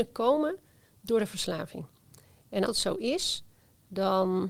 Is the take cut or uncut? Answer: cut